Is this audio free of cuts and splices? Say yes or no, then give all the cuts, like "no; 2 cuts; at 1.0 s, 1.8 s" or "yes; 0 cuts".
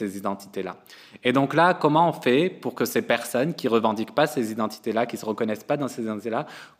yes; 0 cuts